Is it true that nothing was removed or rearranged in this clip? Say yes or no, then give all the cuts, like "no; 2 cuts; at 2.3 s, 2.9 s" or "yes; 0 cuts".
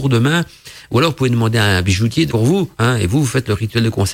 no; 1 cut; at 2.3 s